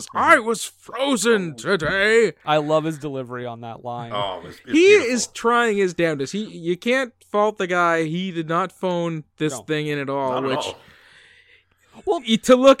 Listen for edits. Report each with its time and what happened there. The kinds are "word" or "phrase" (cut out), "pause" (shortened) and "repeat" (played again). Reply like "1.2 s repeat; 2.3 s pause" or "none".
none